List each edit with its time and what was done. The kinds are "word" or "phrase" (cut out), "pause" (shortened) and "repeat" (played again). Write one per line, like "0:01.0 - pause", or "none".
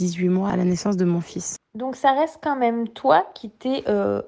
none